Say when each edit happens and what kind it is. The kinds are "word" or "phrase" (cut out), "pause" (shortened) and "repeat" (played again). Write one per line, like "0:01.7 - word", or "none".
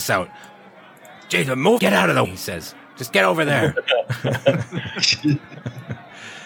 0:01.8 - word
0:02.2 - word